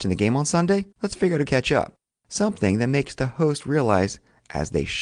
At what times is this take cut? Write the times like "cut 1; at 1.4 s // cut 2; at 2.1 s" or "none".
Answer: cut 1; at 0.9 s // cut 2; at 1.5 s // cut 3; at 2.1 s